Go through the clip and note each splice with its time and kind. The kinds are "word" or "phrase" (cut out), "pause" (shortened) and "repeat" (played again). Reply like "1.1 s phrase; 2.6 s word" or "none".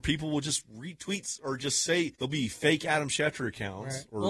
2.2 s pause